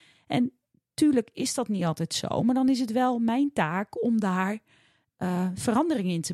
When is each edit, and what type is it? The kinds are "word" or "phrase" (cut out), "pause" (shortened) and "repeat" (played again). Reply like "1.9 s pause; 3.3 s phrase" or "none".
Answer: none